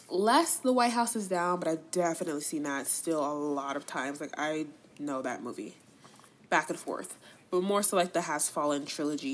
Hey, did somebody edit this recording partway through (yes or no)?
no